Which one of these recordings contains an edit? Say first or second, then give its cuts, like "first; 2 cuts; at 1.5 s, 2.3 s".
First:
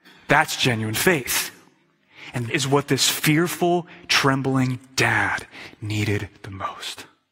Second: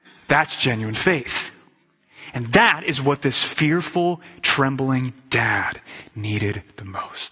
first; 1 cut; at 2.5 s